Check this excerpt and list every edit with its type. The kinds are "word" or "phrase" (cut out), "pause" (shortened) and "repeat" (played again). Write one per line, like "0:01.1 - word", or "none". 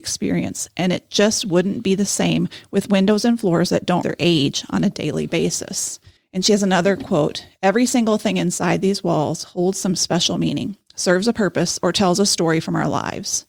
0:04.0 - phrase
0:06.2 - pause